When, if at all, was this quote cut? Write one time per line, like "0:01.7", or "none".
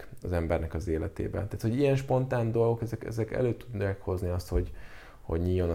none